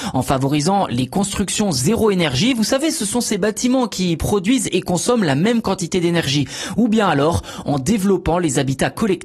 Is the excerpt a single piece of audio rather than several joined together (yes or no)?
yes